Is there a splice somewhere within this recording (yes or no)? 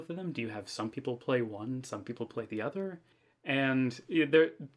no